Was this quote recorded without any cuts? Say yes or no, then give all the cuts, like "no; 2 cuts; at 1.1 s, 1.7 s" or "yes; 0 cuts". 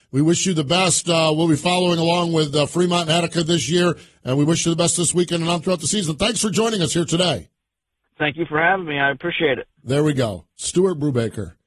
yes; 0 cuts